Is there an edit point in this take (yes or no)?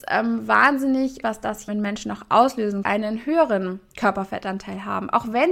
yes